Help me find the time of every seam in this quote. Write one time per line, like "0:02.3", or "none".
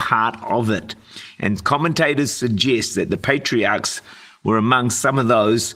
none

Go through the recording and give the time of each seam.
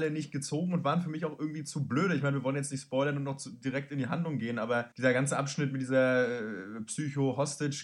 0:04.9

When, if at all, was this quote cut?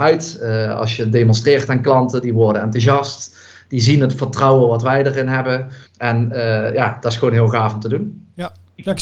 0:05.9

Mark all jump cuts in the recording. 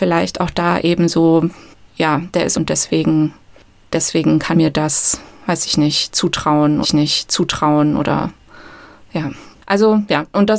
0:01.7
0:02.5
0:04.5
0:06.8
0:09.5

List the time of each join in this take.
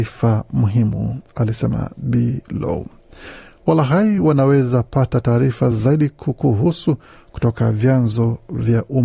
none

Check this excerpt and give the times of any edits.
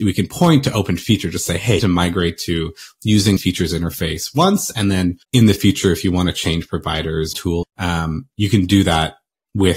0:01.8
0:03.4
0:05.2
0:07.3
0:07.6

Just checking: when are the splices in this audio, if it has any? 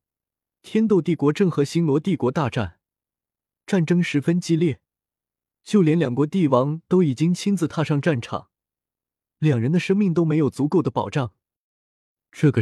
none

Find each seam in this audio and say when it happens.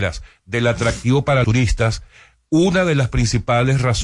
0:01.4

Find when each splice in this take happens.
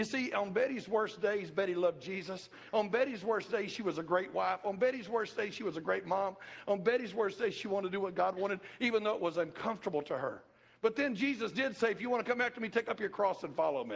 none

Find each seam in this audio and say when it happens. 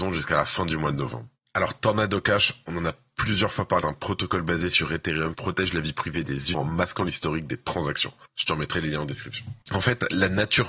0:03.8
0:05.3
0:06.5
0:08.3
0:09.6

